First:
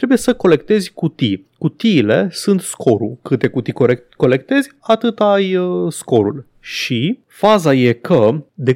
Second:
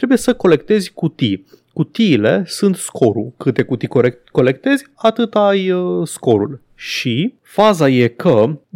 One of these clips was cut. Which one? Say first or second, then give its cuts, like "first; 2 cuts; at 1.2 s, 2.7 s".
first; 1 cut; at 1.5 s